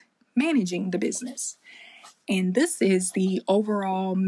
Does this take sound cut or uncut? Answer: uncut